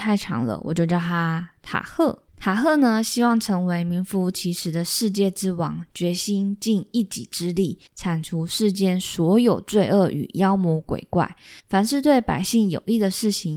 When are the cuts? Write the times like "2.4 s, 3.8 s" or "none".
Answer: 2.3 s, 7.9 s, 11.6 s